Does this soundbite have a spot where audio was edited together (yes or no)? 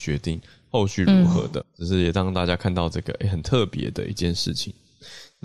yes